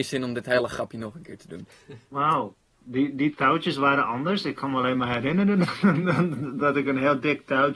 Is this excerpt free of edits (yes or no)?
yes